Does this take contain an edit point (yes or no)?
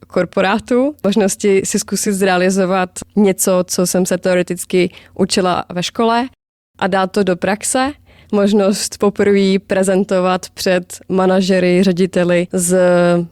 no